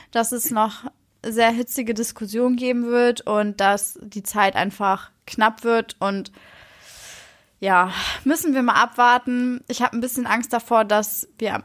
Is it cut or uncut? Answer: uncut